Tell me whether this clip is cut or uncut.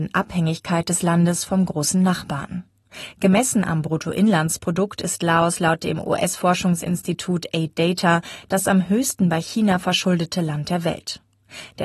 uncut